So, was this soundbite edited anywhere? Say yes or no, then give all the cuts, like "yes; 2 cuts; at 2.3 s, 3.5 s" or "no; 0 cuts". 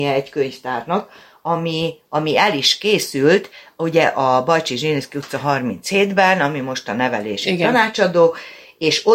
no; 0 cuts